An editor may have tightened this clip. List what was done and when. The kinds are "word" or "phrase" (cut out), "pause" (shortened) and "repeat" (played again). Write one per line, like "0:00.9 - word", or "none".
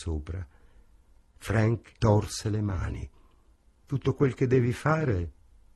0:02.0 - word